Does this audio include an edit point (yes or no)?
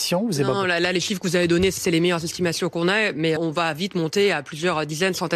yes